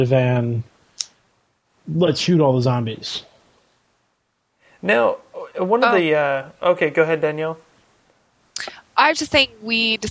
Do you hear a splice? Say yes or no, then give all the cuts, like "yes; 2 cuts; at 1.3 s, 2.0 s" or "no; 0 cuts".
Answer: no; 0 cuts